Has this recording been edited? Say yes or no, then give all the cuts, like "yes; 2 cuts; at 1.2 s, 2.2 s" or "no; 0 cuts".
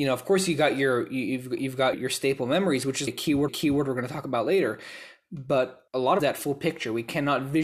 yes; 5 cuts; at 1.9 s, 3.1 s, 3.5 s, 5.9 s, 6.2 s